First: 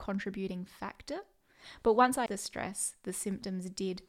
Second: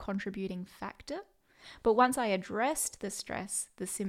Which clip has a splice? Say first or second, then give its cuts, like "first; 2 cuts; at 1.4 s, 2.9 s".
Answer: first; 1 cut; at 2.3 s